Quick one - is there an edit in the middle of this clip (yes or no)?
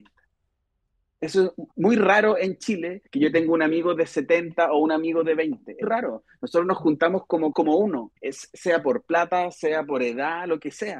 yes